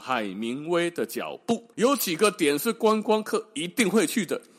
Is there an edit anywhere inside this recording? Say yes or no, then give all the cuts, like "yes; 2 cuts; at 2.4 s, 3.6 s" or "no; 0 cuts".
yes; 1 cut; at 1.7 s